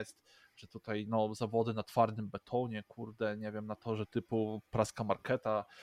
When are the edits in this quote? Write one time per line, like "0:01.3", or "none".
none

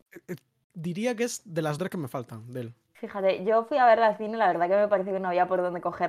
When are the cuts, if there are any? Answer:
0:01.8

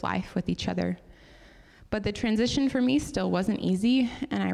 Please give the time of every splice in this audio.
none

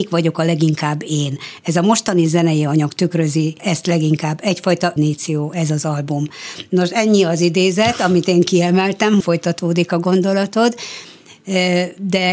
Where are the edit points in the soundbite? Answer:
0:03.6
0:05.0
0:09.2

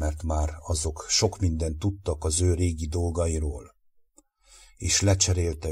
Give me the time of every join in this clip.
none

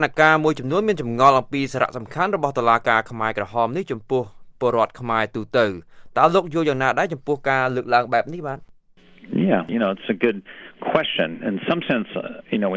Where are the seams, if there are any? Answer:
none

